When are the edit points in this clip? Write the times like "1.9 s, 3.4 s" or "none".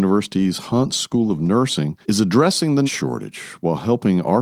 2.0 s, 2.8 s